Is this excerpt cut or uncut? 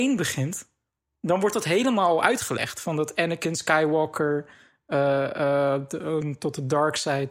uncut